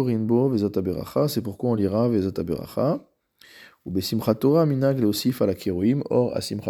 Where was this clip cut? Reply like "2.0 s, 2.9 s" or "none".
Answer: none